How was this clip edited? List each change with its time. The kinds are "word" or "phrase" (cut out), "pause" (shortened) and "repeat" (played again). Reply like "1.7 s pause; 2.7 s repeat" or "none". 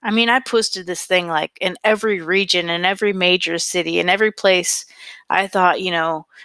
none